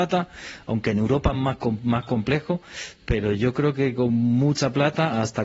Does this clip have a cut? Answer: no; 0 cuts

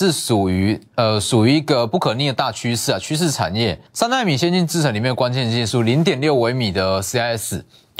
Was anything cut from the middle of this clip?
yes; 1 cut; at 3.9 s

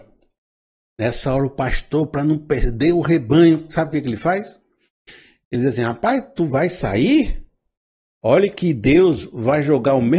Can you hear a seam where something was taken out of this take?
no; 0 cuts

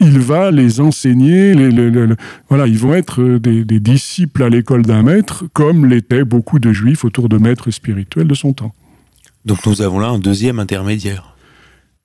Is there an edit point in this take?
no; 0 cuts

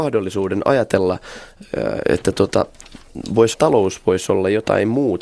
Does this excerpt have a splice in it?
yes; 2 cuts; at 2.0 s, 3.5 s

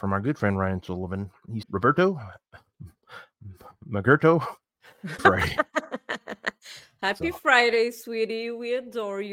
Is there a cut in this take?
yes; 2 cuts; at 1.6 s, 5.2 s

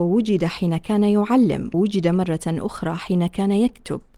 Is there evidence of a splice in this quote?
yes; 1 cut; at 1.7 s

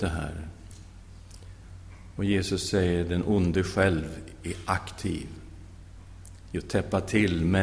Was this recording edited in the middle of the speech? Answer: no; 0 cuts

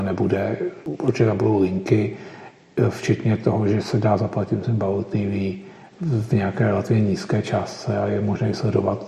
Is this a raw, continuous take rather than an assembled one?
yes; 0 cuts

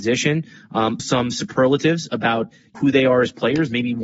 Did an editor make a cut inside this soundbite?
yes; 2 cuts; at 1.0 s, 2.7 s

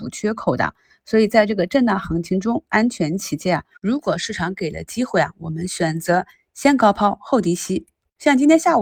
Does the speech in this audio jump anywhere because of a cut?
no; 0 cuts

